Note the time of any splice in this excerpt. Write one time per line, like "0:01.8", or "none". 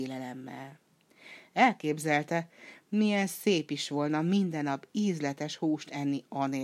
none